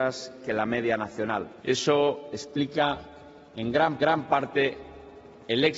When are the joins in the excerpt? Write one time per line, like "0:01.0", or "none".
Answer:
0:01.6
0:03.4
0:04.0